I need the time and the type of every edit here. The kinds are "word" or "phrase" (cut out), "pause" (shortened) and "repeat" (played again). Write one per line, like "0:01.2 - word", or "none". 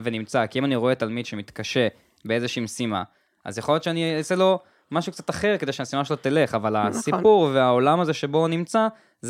none